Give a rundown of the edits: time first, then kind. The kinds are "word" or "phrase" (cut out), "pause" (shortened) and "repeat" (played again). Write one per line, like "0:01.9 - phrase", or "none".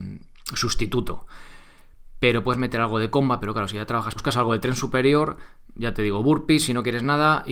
0:04.2 - word

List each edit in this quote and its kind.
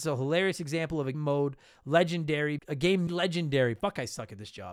0:01.1 - word
0:02.6 - word
0:03.1 - word

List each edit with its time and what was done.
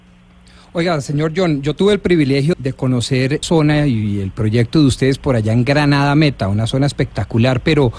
0:02.5 - word
0:03.4 - word

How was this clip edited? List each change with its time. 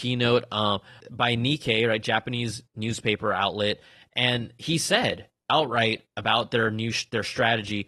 0:01.0 - word
0:05.4 - pause

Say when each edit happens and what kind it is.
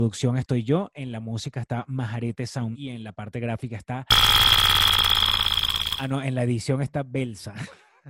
0:02.7 - word

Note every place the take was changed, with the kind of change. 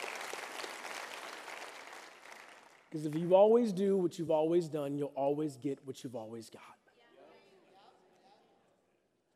none

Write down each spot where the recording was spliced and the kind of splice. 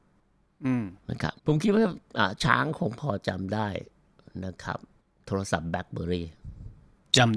0:01.0 - pause
0:01.4 - pause
0:05.0 - pause

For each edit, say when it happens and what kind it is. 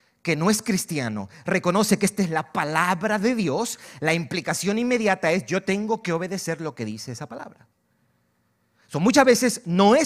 none

